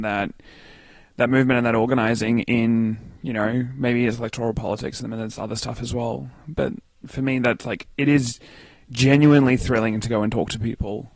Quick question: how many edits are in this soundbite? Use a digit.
0